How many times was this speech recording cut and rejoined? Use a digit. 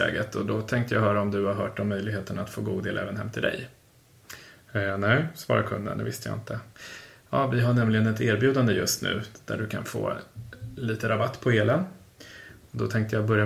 0